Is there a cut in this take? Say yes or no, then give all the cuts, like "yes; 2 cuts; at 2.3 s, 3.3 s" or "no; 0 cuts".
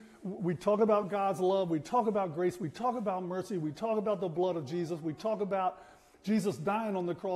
no; 0 cuts